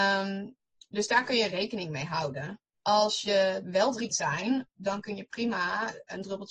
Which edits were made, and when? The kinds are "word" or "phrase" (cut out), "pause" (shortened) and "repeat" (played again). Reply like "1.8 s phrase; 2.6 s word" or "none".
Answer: 3.6 s word; 4.1 s phrase